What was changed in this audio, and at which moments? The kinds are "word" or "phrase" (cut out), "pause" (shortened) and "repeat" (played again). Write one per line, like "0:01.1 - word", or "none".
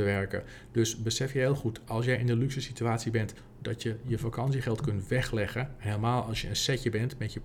none